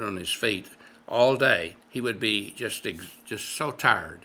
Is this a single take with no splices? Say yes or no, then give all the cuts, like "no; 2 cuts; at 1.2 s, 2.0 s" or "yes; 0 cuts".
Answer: no; 1 cut; at 1.8 s